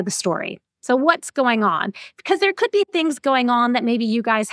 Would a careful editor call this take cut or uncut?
uncut